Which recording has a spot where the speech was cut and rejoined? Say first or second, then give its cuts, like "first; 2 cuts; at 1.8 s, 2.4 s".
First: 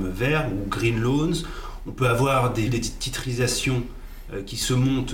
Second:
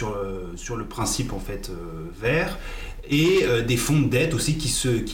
first; 1 cut; at 2.7 s